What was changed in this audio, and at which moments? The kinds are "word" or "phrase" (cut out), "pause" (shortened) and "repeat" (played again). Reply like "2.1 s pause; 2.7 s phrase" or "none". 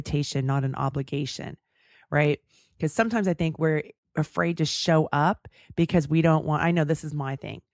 none